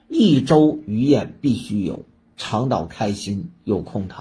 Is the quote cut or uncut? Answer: uncut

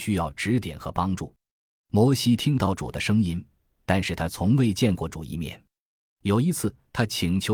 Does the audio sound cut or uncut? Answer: uncut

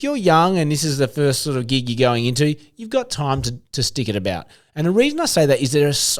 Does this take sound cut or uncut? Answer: uncut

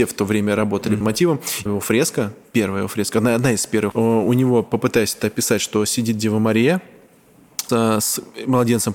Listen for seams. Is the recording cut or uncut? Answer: cut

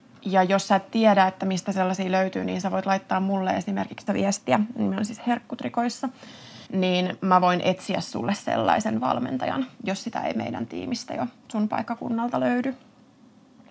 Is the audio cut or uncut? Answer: cut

